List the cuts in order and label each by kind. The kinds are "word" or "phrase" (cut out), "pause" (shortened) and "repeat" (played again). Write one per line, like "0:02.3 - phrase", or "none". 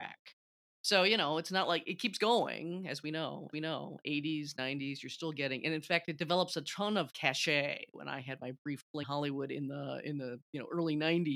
0:03.5 - repeat
0:07.1 - word
0:09.0 - word

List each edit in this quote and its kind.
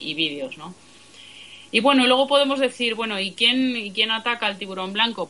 none

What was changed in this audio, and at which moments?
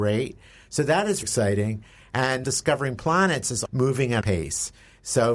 0:01.2 - word
0:02.4 - phrase
0:03.7 - word
0:04.2 - phrase

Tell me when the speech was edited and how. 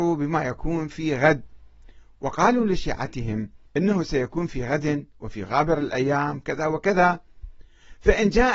0:03.7 - pause

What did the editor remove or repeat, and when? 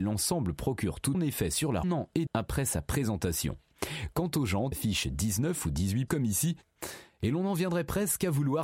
0:01.1 - phrase
0:01.8 - phrase
0:02.3 - word
0:04.7 - word
0:06.1 - word

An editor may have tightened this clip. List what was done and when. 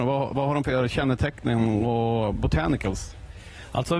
none

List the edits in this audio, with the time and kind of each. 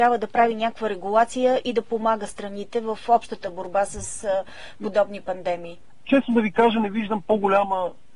none

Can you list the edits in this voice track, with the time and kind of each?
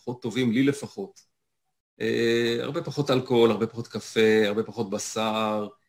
none

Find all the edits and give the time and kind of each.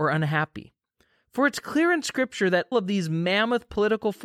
0:02.7 - word

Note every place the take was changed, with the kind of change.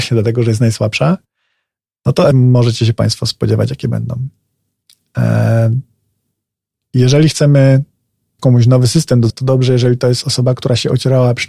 0:02.3 - word
0:08.4 - word
0:09.3 - word

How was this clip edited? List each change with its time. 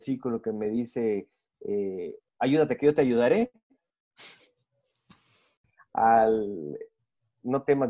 none

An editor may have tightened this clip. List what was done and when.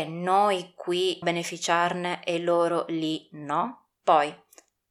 0:01.2 - word

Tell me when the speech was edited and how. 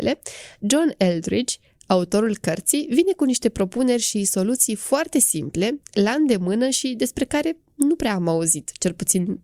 none

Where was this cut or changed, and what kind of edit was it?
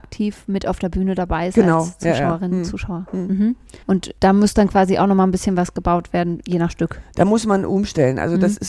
0:03.8 - pause

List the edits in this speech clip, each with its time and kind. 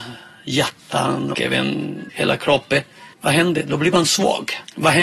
0:01.3 - word
0:02.1 - word
0:03.1 - pause

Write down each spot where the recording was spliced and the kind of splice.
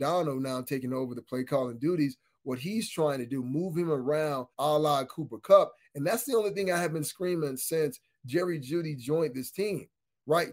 0:04.5 - pause

